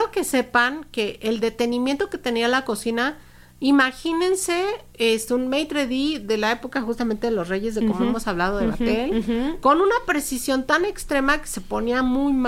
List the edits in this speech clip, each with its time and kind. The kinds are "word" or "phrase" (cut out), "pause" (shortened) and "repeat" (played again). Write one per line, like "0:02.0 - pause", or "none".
none